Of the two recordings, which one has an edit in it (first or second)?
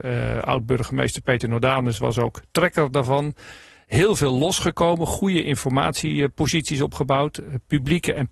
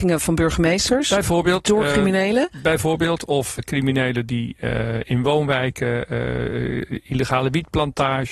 second